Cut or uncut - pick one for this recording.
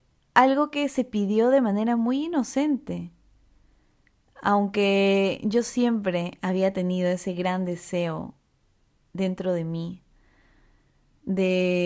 uncut